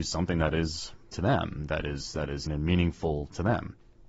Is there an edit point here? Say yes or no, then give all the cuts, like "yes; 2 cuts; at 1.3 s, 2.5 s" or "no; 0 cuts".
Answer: yes; 2 cuts; at 1.1 s, 2.5 s